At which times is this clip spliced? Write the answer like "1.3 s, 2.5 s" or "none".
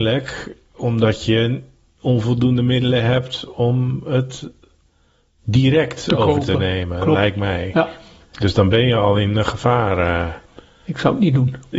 none